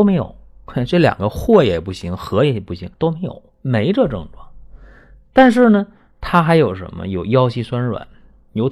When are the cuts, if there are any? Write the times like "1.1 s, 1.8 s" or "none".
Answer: 2.9 s, 3.5 s